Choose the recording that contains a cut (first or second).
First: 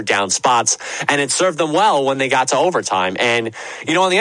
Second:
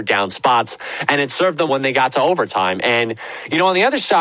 second